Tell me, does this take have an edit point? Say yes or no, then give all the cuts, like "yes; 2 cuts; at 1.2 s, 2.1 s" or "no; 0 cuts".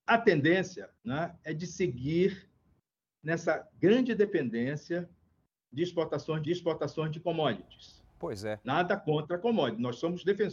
yes; 2 cuts; at 1.0 s, 6.4 s